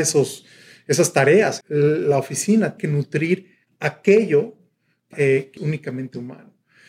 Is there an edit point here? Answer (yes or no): yes